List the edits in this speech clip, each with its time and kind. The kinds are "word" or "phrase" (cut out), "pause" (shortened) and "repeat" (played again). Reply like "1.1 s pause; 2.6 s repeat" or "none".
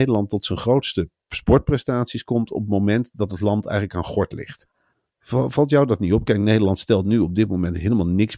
4.9 s pause

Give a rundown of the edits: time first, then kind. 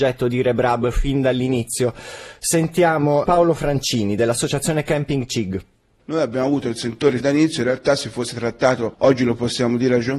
3.2 s word; 7.2 s word

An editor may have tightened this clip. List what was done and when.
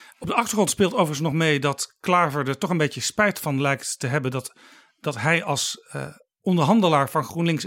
none

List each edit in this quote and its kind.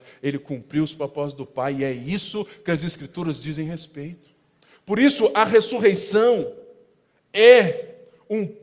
none

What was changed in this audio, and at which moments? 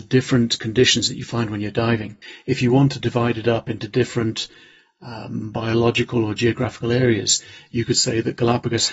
none

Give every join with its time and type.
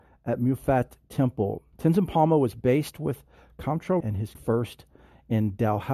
1.7 s pause; 4.0 s word; 4.3 s word

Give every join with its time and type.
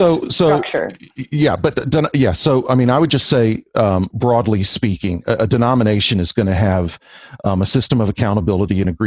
none

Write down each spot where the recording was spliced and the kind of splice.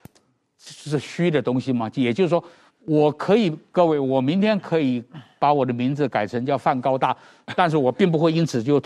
2.7 s pause

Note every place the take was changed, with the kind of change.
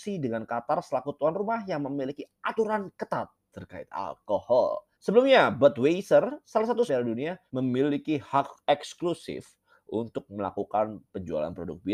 4.9 s pause; 6.9 s phrase; 7.5 s pause

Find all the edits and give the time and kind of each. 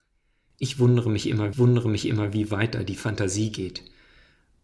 1.5 s repeat

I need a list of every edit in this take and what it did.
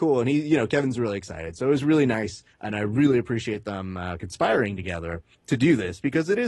2.5 s pause; 5.3 s pause

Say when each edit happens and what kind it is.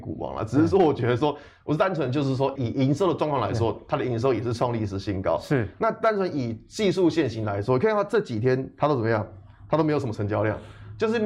2.6 s word

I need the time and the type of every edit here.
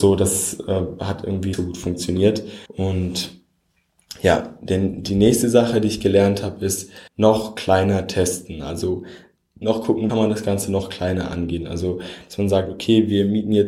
1.5 s word; 2.7 s pause; 7.1 s pause; 9.6 s word; 10.1 s phrase

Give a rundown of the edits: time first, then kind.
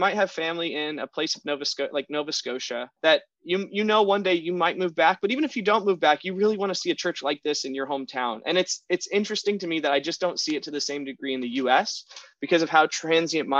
3.0 s pause

